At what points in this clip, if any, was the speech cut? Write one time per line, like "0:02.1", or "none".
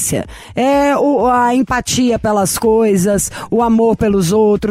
none